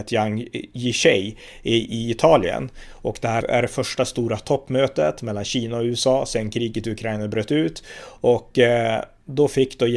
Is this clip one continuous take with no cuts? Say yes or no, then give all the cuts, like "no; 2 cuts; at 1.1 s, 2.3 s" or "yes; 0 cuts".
no; 1 cut; at 3.4 s